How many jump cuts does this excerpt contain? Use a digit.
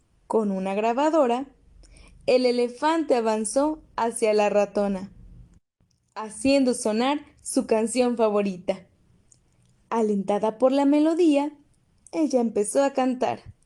0